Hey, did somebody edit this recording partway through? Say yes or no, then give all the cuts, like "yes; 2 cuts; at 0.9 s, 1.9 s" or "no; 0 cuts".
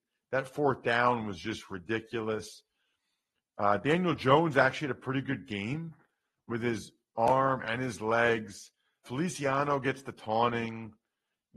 yes; 1 cut; at 9.0 s